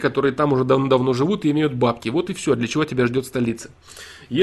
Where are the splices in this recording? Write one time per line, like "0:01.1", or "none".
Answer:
none